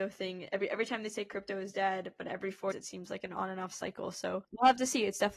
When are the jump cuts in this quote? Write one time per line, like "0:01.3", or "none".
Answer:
0:02.7
0:04.4